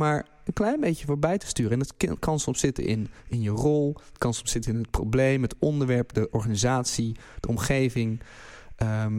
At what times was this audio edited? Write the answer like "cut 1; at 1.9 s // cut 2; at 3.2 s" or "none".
none